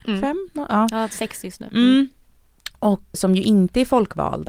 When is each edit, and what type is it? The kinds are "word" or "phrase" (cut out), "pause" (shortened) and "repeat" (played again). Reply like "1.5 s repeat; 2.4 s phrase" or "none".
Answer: 3.1 s word